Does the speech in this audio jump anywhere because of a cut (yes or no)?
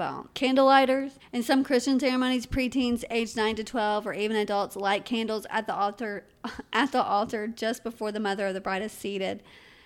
yes